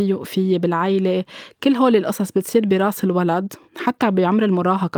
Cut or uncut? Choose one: cut